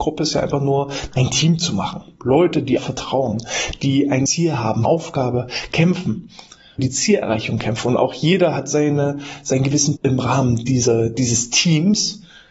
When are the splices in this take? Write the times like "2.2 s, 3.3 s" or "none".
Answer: 1.1 s, 2.8 s, 4.3 s, 4.8 s, 6.8 s, 10.0 s